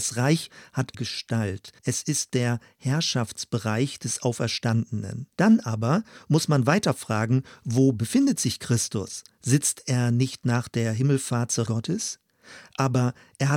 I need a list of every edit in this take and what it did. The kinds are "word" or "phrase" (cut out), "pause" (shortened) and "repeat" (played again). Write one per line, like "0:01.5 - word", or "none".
0:00.9 - phrase
0:01.8 - pause
0:05.3 - pause
0:11.7 - word